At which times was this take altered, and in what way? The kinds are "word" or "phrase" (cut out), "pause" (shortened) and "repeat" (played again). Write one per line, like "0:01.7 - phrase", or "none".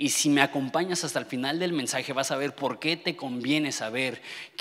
none